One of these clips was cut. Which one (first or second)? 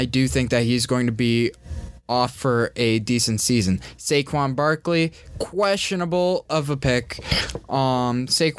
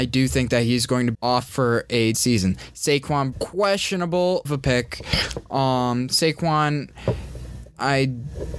second